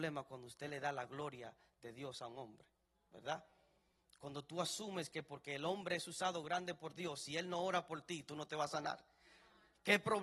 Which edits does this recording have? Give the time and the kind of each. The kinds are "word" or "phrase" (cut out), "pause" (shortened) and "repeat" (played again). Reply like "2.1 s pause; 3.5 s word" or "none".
none